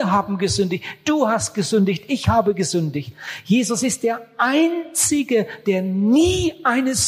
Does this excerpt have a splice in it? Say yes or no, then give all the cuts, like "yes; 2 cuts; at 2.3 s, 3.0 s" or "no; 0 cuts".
no; 0 cuts